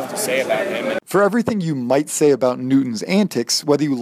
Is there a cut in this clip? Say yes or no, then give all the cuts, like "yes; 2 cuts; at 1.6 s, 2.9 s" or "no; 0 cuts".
yes; 1 cut; at 1.0 s